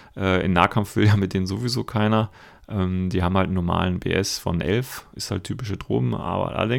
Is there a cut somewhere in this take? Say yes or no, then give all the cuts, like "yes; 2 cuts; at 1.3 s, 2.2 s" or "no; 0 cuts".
no; 0 cuts